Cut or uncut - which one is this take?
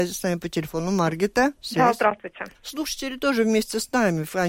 cut